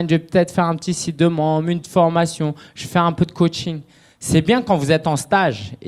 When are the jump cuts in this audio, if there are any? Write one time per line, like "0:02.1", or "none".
0:01.8

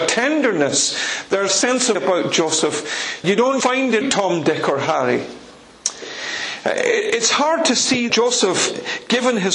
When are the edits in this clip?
0:01.5
0:01.9
0:03.2
0:03.6
0:04.0
0:08.1

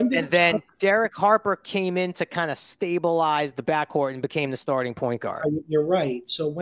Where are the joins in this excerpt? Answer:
none

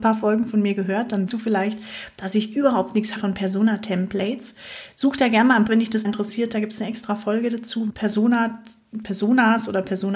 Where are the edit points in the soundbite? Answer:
0:01.3
0:03.2
0:05.7
0:06.0
0:07.9

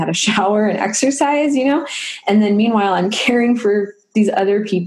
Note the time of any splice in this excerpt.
none

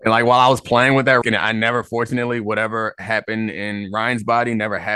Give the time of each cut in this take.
0:01.2

